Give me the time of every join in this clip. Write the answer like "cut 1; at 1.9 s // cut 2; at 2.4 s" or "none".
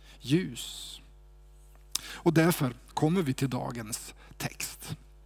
none